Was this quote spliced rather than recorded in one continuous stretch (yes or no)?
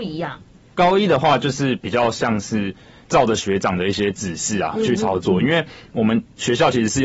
no